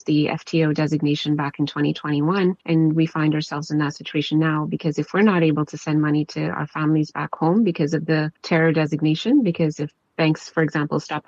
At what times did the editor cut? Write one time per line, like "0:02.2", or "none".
0:02.6
0:08.4